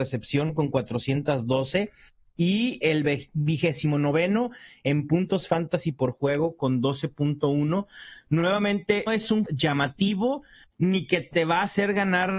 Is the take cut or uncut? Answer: cut